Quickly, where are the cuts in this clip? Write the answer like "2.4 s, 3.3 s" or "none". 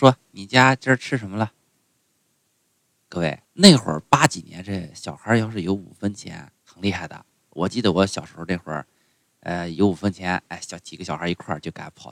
3.4 s, 6.6 s